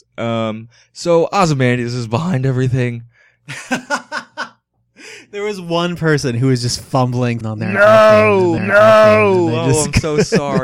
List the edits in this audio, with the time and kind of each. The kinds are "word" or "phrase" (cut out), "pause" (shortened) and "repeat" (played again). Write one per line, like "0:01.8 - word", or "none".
0:07.4 - phrase
0:08.6 - repeat